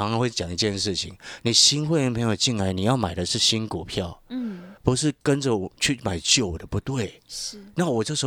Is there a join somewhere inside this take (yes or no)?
yes